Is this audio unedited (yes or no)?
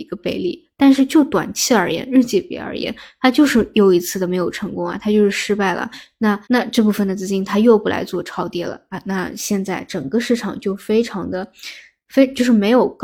no